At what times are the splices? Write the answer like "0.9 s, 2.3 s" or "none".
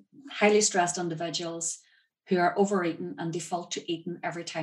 none